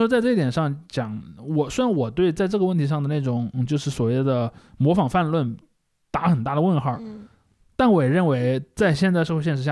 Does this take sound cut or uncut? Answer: uncut